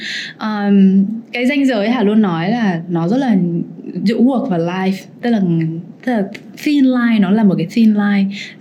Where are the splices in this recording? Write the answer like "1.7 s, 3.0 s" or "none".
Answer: none